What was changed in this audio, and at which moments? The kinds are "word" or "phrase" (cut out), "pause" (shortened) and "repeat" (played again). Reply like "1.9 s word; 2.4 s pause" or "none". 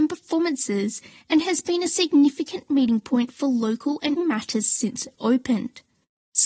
4.2 s word